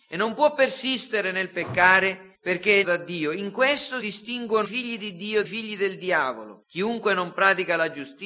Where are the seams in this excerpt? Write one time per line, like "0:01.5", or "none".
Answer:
0:02.3
0:02.8
0:04.0
0:04.6
0:05.4
0:06.6